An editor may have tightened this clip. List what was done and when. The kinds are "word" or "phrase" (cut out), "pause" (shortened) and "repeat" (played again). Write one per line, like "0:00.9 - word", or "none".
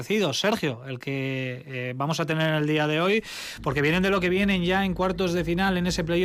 none